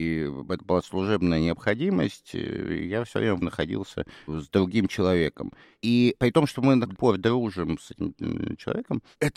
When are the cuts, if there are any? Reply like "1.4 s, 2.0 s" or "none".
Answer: 3.4 s, 7.0 s